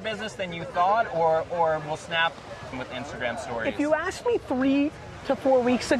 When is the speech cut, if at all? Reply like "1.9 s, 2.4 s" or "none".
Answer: 2.7 s